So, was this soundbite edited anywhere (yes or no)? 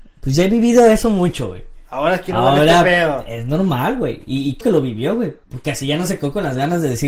yes